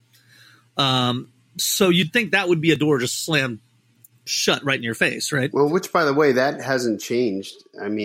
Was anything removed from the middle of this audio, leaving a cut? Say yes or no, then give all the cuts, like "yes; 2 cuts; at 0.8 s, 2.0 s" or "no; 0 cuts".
no; 0 cuts